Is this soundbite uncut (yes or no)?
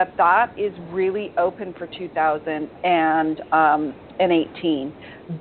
yes